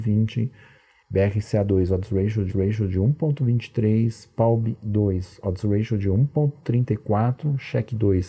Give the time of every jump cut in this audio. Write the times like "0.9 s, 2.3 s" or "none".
2.5 s